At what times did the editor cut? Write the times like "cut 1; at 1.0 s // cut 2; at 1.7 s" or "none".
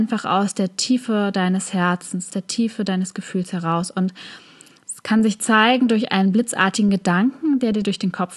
cut 1; at 2.3 s